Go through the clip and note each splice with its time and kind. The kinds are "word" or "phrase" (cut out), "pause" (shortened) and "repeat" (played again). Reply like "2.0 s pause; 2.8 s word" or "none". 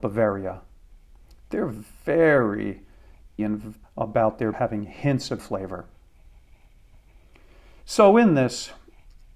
3.4 s word; 3.8 s word; 4.5 s word; 5.4 s word